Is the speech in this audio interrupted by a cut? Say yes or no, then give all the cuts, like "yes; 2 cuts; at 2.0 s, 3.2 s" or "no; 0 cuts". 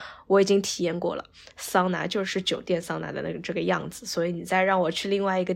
no; 0 cuts